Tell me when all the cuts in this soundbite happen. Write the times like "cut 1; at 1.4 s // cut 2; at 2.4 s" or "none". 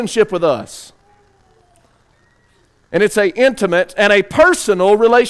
none